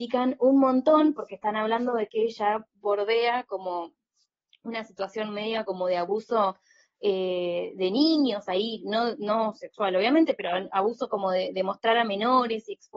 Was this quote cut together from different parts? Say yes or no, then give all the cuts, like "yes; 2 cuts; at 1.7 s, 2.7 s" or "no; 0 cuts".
no; 0 cuts